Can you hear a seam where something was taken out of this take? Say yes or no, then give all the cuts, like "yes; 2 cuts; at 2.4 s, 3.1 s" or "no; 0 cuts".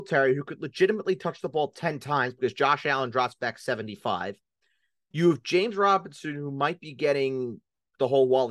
no; 0 cuts